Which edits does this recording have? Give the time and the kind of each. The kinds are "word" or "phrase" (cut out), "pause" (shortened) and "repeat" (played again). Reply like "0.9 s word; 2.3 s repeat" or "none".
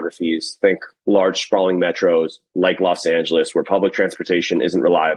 none